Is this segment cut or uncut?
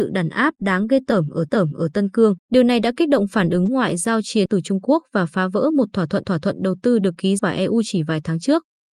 cut